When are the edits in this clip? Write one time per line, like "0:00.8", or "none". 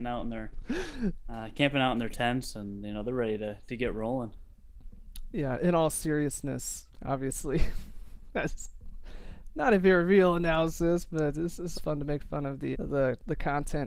0:06.9
0:11.7
0:12.7